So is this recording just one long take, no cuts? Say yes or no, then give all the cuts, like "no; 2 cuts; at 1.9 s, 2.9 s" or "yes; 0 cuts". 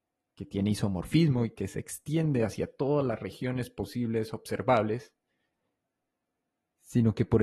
yes; 0 cuts